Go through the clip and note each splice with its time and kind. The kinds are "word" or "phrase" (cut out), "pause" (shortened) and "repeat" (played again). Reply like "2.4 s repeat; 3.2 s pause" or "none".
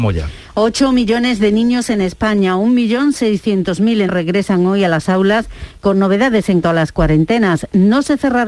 4.1 s word; 6.6 s word